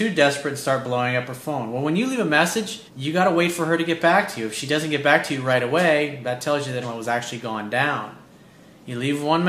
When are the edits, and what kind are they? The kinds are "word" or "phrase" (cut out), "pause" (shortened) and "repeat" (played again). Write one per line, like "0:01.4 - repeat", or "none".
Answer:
0:02.9 - pause
0:06.8 - phrase